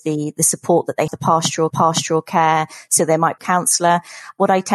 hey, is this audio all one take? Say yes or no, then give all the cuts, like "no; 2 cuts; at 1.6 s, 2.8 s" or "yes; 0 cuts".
no; 3 cuts; at 1.1 s, 1.7 s, 3.4 s